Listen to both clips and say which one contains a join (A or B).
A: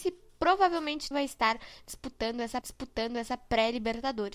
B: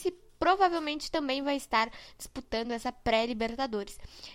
A